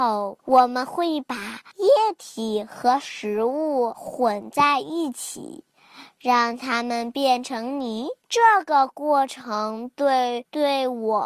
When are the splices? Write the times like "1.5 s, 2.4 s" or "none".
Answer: 8.2 s